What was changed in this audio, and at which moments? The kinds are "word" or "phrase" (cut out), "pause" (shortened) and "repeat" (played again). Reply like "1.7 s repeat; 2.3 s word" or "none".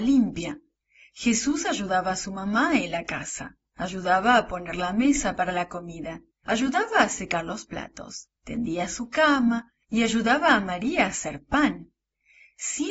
3.6 s pause; 6.3 s pause; 8.4 s pause